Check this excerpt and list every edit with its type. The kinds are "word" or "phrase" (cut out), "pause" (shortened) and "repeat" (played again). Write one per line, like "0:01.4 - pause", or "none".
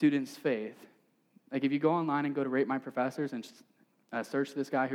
none